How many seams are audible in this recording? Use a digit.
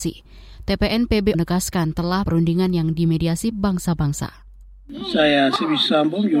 3